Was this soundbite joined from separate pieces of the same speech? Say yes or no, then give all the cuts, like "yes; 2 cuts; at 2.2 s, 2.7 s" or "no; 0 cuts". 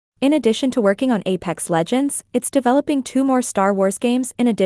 no; 0 cuts